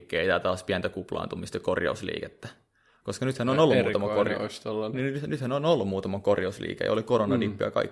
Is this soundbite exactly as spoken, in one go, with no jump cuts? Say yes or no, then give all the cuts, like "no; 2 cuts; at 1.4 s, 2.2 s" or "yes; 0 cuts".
yes; 0 cuts